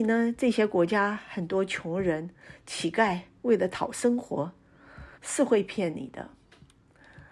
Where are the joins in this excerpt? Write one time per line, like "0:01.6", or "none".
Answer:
0:05.1